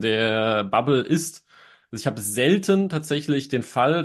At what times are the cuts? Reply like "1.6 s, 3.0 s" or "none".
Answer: none